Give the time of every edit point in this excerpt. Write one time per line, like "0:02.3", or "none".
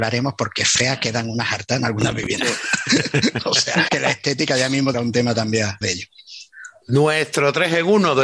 0:03.9
0:04.9
0:05.8